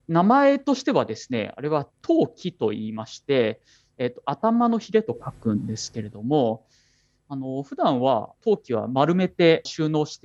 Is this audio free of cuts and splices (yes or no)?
yes